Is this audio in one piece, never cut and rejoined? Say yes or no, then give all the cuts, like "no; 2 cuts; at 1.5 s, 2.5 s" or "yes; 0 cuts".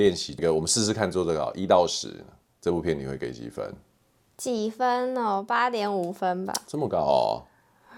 yes; 0 cuts